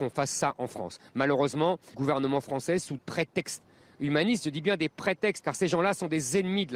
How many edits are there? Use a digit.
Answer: 3